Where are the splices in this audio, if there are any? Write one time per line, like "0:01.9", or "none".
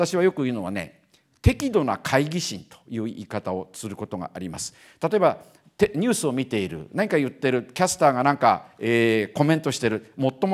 none

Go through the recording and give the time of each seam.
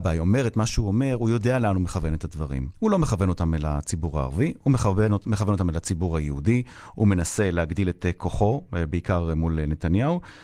0:02.7

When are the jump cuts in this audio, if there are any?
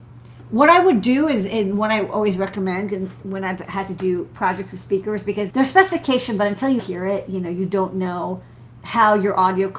0:05.5
0:06.8
0:08.8

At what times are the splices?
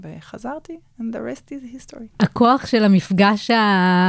0:02.1

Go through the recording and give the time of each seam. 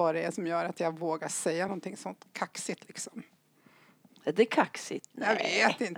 none

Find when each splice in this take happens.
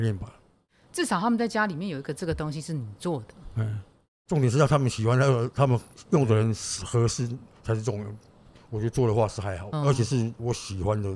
0:09.7

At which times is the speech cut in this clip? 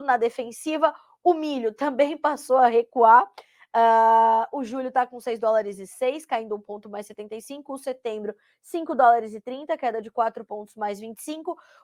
none

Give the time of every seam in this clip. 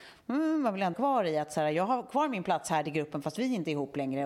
0:00.9

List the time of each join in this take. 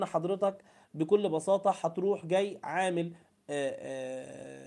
none

